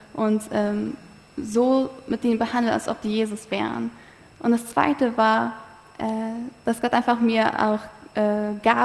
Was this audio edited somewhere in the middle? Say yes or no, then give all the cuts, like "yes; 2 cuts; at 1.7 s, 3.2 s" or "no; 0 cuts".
no; 0 cuts